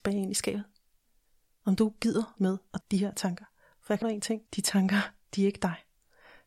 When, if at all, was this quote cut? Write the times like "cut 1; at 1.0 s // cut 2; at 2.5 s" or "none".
cut 1; at 2.4 s // cut 2; at 2.8 s // cut 3; at 4.0 s // cut 4; at 4.5 s